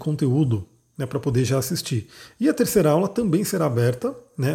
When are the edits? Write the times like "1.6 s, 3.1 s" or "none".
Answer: none